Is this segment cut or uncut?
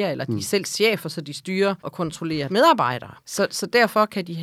cut